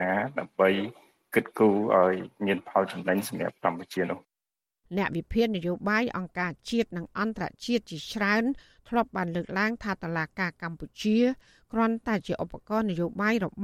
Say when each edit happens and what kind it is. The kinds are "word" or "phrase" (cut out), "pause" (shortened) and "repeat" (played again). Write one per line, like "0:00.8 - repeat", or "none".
none